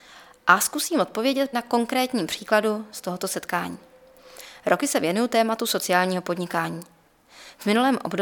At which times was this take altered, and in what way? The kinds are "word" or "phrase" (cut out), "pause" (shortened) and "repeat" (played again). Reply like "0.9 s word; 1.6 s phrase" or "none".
1.5 s word